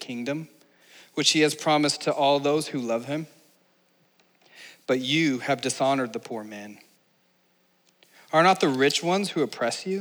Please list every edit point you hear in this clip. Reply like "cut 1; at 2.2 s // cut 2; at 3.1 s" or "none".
none